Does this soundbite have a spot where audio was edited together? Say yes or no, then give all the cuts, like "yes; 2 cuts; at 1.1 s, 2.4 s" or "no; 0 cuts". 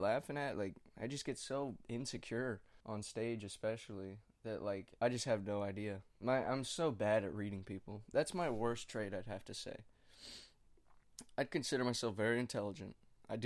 yes; 3 cuts; at 2.8 s, 5.0 s, 6.1 s